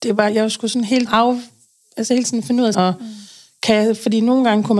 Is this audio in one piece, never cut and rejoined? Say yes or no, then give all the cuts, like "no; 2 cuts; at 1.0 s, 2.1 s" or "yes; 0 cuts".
no; 3 cuts; at 1.1 s, 2.2 s, 2.7 s